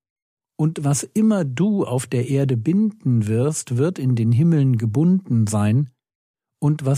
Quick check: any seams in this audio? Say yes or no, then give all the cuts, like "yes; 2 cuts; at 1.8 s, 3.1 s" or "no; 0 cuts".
no; 0 cuts